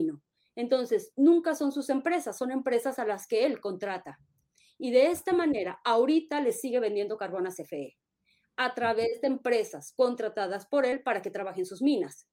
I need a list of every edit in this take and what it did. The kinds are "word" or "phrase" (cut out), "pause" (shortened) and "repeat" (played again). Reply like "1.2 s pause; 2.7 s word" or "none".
none